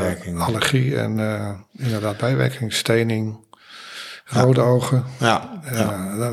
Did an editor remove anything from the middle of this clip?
no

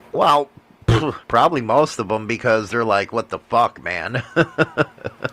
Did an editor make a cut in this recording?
yes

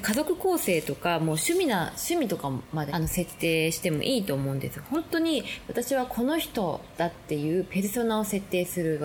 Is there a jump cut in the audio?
yes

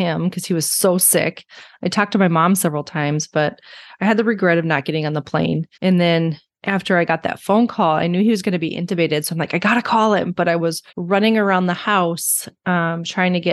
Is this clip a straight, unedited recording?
no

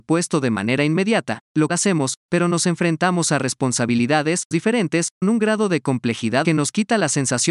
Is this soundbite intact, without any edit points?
no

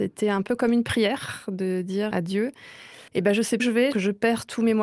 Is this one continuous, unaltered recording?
no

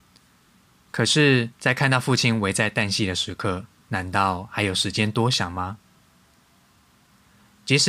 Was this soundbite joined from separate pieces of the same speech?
yes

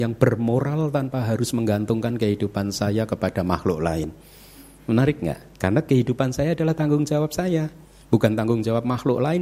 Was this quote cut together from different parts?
no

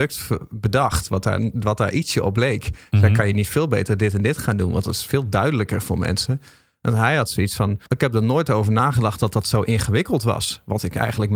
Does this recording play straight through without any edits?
no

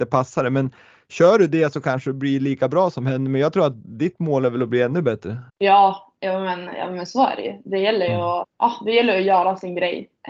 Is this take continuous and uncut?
no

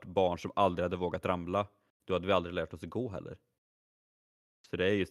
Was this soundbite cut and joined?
no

